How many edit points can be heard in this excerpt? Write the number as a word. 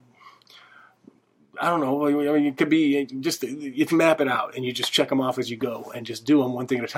one